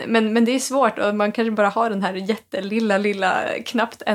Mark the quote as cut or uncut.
uncut